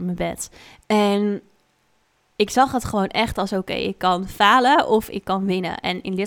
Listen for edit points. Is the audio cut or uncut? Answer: uncut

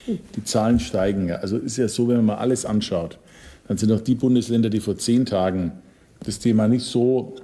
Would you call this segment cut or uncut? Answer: uncut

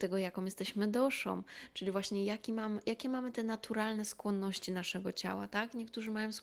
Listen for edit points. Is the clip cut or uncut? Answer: uncut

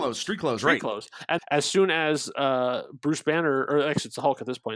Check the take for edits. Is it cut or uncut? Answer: cut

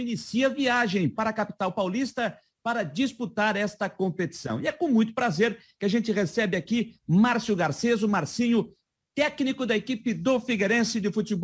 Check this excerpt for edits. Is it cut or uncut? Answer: uncut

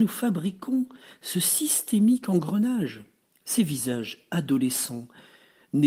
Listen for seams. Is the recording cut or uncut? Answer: cut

